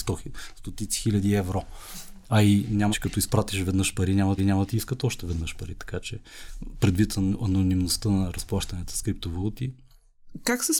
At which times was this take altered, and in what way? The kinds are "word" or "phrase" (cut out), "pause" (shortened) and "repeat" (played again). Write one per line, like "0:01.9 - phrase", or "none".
0:02.9 - phrase
0:04.4 - repeat